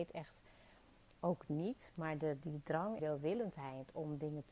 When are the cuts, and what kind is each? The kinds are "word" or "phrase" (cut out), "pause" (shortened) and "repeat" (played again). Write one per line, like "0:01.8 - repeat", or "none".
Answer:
0:01.1 - phrase
0:02.4 - word
0:03.0 - phrase